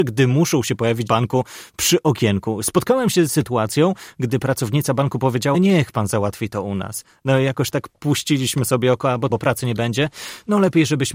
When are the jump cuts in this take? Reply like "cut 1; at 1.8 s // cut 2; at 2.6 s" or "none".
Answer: cut 1; at 1.1 s // cut 2; at 3.3 s // cut 3; at 5.5 s // cut 4; at 9.3 s